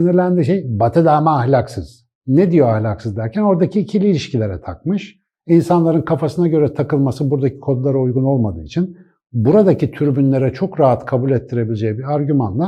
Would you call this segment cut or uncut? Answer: uncut